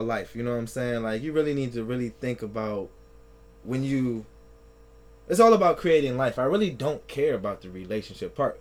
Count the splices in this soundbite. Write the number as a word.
zero